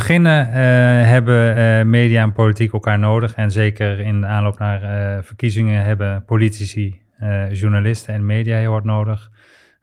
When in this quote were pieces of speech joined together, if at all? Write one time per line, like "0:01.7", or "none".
none

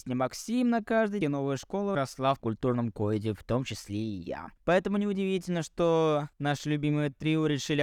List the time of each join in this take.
0:01.2
0:01.9
0:02.4
0:04.6
0:06.3

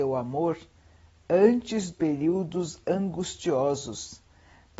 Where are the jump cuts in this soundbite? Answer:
0:01.9

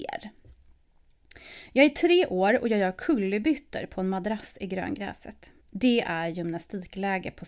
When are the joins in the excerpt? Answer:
0:05.6

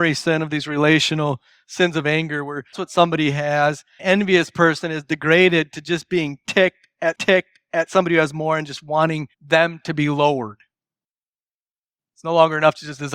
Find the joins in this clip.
0:02.7
0:04.0
0:07.1
0:09.3

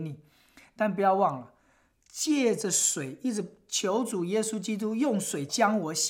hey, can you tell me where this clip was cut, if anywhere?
none

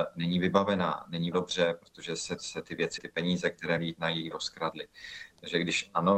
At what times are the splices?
0:01.3
0:02.4
0:03.0
0:03.8
0:04.3

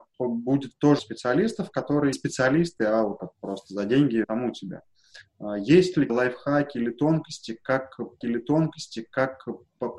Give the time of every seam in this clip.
0:01.0
0:02.1
0:03.2
0:04.2
0:06.1
0:08.2

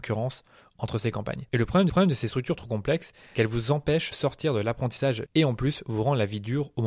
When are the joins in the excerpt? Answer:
0:01.5
0:01.9
0:03.3
0:04.1
0:05.3

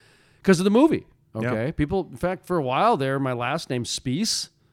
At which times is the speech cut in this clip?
none

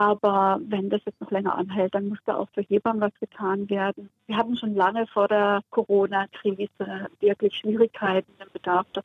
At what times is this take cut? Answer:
none

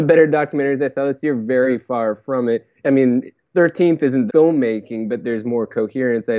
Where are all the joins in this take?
0:03.4
0:04.3

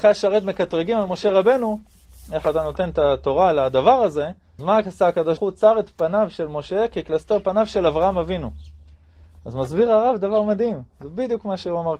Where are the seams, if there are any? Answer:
0:04.6
0:05.4

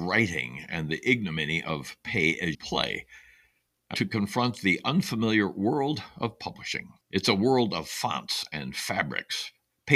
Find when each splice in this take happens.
0:02.5
0:03.9
0:07.0

